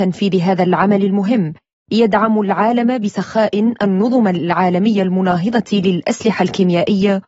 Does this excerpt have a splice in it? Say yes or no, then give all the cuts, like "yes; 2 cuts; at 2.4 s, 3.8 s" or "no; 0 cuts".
no; 0 cuts